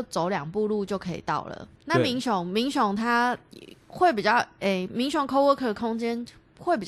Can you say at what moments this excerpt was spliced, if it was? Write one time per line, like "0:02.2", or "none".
0:01.8
0:03.8